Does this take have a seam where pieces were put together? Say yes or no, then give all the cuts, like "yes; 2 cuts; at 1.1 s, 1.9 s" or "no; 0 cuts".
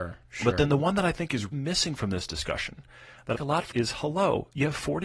yes; 3 cuts; at 1.5 s, 3.3 s, 3.7 s